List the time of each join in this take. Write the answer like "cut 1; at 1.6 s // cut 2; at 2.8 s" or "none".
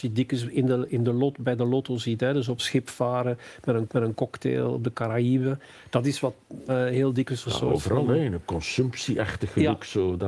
cut 1; at 2.6 s // cut 2; at 3.9 s // cut 3; at 6.7 s // cut 4; at 7.5 s